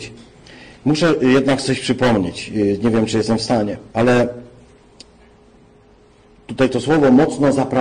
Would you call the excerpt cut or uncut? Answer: cut